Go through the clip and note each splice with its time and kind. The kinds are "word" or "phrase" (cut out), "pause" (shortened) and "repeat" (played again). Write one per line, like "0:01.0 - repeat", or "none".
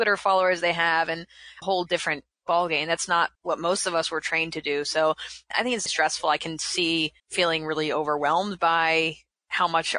0:01.6 - phrase
0:03.3 - pause
0:05.9 - word
0:07.2 - pause